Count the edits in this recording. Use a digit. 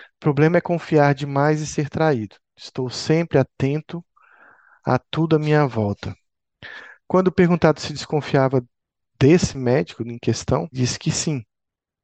1